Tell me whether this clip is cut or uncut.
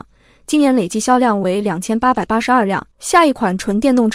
cut